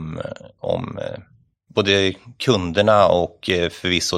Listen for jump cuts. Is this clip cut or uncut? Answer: uncut